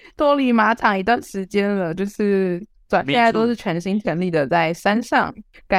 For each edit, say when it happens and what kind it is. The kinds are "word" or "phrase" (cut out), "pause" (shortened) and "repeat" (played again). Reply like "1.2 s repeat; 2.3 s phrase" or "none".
none